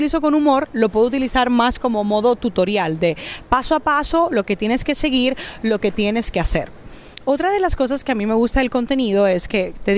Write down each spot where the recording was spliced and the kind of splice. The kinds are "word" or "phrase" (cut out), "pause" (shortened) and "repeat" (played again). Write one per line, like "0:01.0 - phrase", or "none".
none